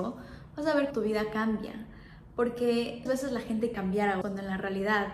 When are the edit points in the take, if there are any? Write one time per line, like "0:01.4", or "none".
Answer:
0:00.9
0:03.1
0:03.7
0:04.2